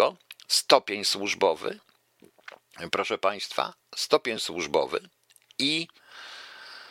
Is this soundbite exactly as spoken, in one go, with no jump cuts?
yes; 0 cuts

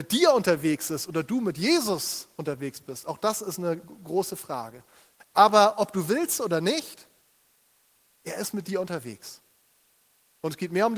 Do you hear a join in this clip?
no; 0 cuts

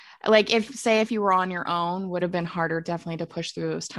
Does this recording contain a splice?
yes; 1 cut; at 2.2 s

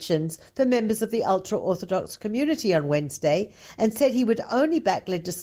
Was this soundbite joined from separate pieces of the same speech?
no; 0 cuts

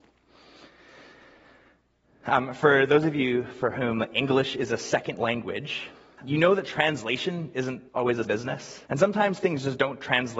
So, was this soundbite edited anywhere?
yes; 4 cuts; at 6.2 s, 7.9 s, 8.2 s, 8.9 s

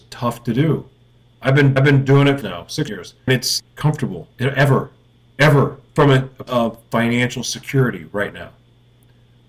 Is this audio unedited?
no; 8 cuts; at 1.8 s, 2.4 s, 2.9 s, 3.3 s, 3.6 s, 4.3 s, 5.9 s, 6.5 s

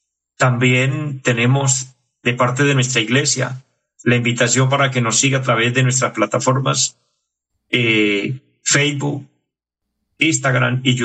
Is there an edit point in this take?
no; 0 cuts

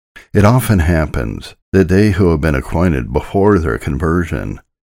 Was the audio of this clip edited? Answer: yes; 1 cut; at 1.6 s

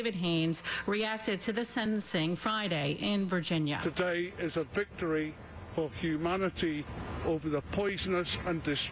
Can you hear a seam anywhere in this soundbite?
no; 0 cuts

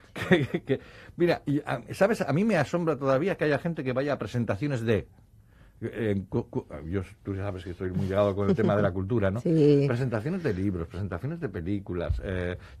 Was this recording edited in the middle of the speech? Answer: no; 0 cuts

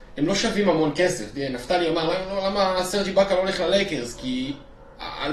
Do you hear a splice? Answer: no; 0 cuts

